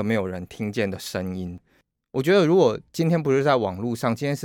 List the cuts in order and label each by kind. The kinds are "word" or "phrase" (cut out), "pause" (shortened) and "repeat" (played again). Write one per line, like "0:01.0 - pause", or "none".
0:02.9 - pause